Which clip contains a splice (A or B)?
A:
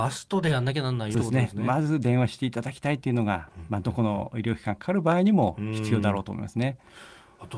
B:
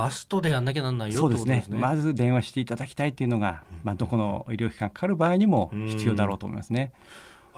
A